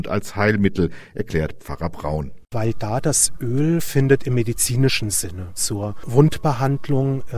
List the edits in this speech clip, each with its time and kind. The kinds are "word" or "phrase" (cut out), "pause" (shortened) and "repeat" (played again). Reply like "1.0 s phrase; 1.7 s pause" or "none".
3.8 s word